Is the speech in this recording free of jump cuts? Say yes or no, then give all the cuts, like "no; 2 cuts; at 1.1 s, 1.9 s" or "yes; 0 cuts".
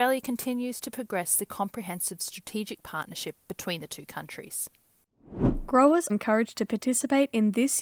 no; 1 cut; at 6.1 s